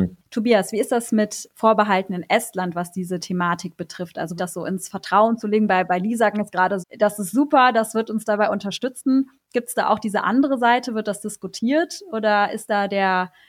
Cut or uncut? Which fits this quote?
cut